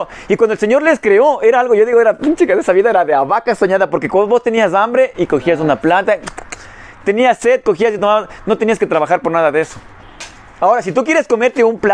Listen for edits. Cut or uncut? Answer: uncut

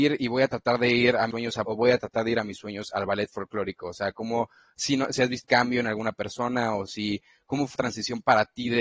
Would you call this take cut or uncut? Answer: cut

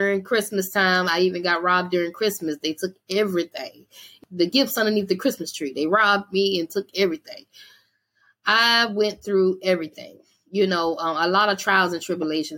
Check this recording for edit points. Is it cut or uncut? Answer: uncut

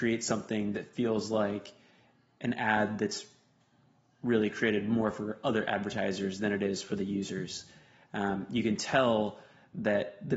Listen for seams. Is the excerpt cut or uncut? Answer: uncut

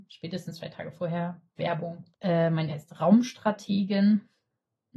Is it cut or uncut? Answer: cut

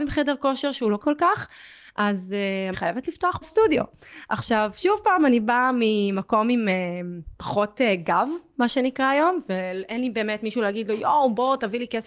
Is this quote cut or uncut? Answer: cut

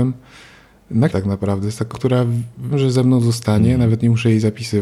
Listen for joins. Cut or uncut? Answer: cut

